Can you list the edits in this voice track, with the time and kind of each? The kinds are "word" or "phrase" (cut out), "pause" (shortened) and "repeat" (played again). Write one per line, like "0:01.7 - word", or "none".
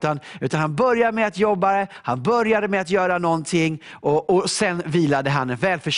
none